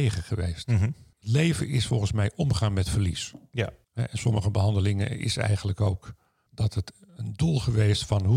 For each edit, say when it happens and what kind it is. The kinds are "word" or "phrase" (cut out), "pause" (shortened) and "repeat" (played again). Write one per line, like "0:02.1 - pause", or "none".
none